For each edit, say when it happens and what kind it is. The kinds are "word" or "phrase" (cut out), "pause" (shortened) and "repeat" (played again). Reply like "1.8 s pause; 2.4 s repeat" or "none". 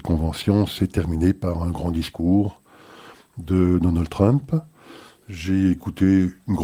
none

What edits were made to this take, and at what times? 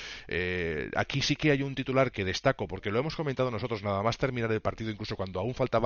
2.1 s word

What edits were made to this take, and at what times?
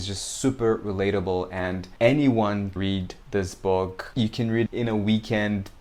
2.8 s word; 4.7 s word

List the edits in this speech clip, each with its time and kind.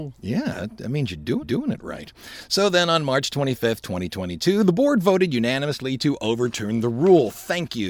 1.4 s repeat

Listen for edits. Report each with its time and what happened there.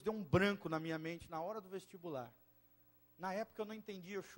none

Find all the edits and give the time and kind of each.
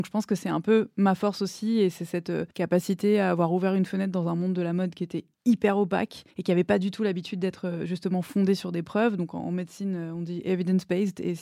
2.5 s pause; 5.3 s pause; 6.3 s pause

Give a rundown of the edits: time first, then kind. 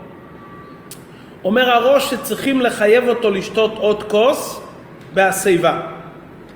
none

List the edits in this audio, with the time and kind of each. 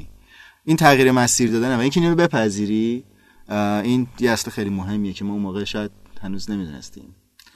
none

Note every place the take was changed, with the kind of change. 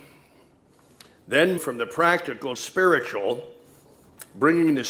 1.6 s word; 2.6 s phrase

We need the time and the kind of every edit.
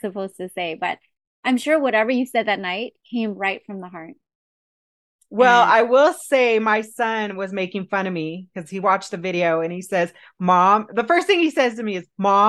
none

